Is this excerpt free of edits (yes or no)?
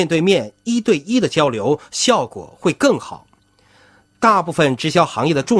yes